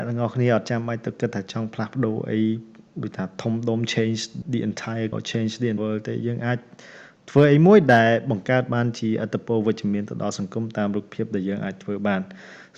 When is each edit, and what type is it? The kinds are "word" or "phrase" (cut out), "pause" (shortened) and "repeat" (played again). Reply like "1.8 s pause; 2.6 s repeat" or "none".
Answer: 4.4 s word; 5.1 s word; 5.8 s word